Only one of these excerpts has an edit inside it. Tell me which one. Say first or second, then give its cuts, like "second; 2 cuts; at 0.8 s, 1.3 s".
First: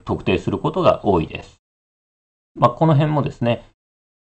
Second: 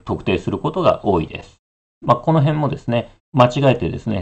second; 2 cuts; at 1.7 s, 3.2 s